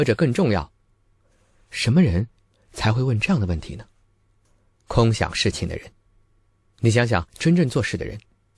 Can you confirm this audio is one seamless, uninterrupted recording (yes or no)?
no